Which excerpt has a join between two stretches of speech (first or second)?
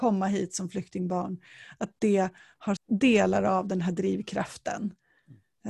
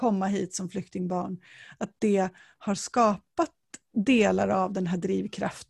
first